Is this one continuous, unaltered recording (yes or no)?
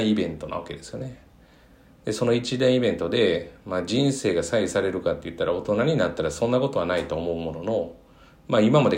yes